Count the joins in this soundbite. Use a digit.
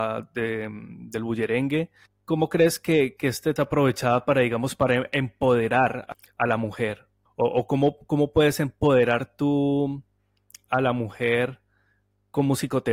2